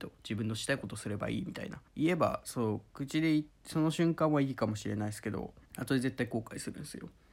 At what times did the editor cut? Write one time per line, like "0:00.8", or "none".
0:01.9
0:03.5
0:05.7